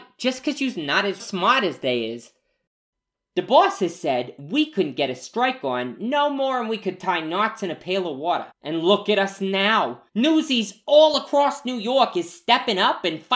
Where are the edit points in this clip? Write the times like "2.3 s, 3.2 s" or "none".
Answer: 1.2 s, 8.5 s, 10.1 s